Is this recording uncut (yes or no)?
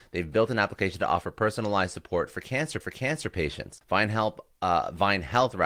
no